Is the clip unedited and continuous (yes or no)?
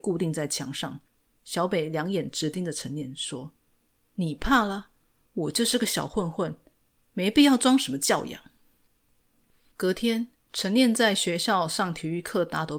yes